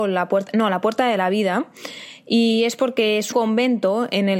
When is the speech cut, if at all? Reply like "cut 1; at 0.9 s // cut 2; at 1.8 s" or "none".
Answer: cut 1; at 3.3 s